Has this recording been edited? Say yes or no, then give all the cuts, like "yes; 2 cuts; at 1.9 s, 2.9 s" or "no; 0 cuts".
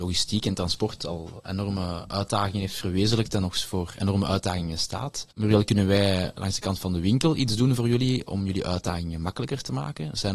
yes; 1 cut; at 5.3 s